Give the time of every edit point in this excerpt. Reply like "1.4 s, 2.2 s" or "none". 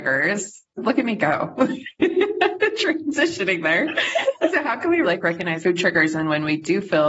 5.0 s, 5.6 s